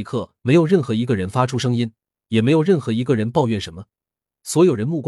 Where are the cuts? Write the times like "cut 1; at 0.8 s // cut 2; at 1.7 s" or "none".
none